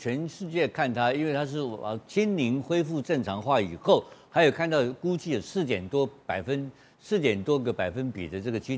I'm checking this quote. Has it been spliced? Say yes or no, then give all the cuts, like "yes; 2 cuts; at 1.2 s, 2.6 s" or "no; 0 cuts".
no; 0 cuts